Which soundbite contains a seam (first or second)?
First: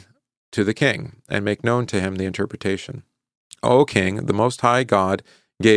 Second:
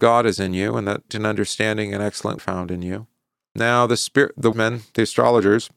second